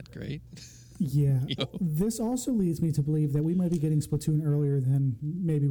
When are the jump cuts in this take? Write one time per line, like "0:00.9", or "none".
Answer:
0:01.6